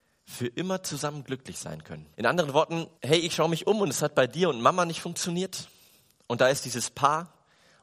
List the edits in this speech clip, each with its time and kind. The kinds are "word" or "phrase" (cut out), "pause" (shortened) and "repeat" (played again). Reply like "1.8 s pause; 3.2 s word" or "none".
2.1 s pause; 3.0 s pause